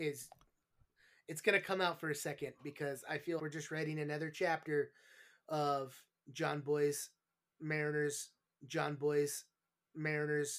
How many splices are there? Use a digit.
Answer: 2